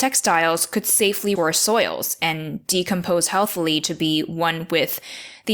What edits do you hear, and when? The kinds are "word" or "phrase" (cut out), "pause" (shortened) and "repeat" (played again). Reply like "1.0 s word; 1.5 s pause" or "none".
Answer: 1.4 s phrase